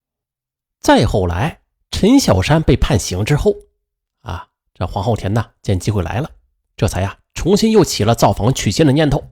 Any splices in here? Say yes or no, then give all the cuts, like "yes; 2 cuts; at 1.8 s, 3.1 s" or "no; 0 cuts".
no; 0 cuts